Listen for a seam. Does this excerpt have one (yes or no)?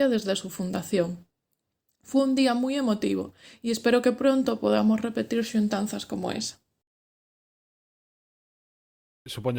no